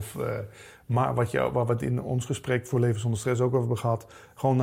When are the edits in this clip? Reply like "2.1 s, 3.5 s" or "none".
none